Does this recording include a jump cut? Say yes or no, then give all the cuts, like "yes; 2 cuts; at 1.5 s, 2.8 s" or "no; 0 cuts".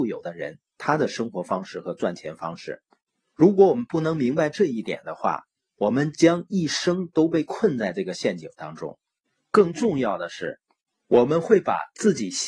no; 0 cuts